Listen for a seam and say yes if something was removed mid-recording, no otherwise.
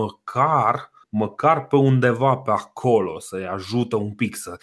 yes